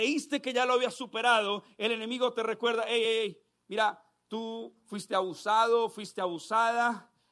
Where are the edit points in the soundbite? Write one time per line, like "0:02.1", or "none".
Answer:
none